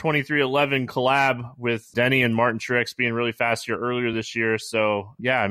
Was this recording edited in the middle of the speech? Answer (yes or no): no